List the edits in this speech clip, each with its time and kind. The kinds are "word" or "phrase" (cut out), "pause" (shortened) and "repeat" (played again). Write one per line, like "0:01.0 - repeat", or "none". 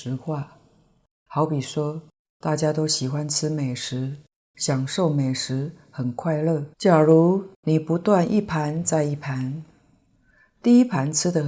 0:06.7 - pause